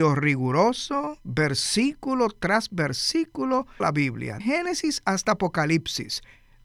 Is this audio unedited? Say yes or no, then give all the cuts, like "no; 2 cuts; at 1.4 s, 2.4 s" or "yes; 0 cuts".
no; 2 cuts; at 3.8 s, 4.4 s